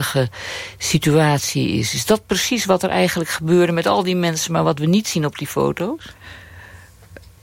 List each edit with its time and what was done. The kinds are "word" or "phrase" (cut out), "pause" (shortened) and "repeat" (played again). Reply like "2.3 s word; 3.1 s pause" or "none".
none